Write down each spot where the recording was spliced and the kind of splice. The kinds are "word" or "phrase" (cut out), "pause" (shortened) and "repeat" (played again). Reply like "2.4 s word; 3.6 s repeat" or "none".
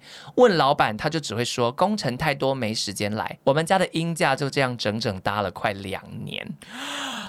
3.4 s pause